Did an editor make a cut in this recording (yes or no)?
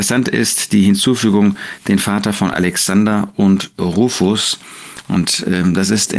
no